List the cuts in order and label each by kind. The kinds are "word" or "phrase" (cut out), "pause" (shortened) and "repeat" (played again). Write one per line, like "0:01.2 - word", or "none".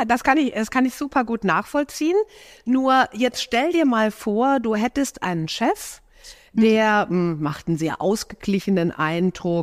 none

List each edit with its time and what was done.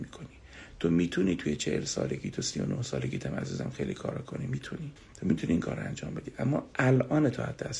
0:05.0 - pause

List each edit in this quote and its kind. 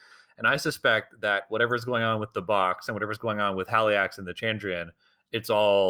none

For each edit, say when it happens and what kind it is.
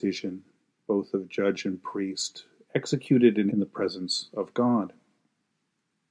0:03.5 - phrase

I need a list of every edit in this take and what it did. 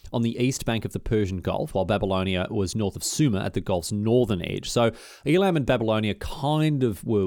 0:02.7 - word

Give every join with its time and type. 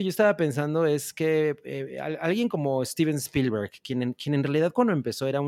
none

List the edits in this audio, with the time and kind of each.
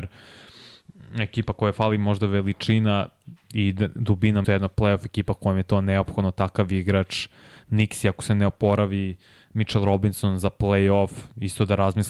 0:04.4 - phrase

